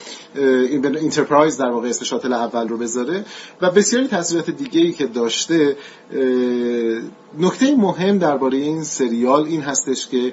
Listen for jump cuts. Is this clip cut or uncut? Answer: uncut